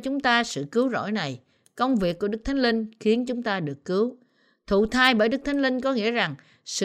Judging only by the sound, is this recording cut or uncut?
uncut